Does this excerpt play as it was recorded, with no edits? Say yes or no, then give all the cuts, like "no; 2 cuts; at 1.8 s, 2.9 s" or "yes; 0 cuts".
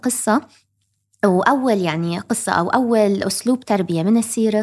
yes; 0 cuts